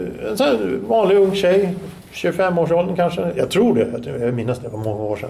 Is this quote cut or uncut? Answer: uncut